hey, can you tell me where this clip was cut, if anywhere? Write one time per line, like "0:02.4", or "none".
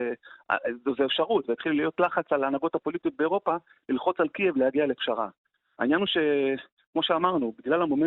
none